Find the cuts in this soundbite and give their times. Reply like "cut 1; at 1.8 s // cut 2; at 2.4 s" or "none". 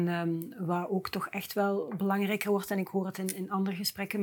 none